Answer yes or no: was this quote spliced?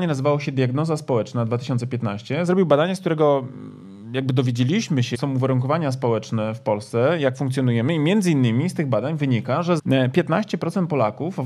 yes